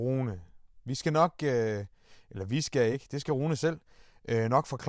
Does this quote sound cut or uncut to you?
uncut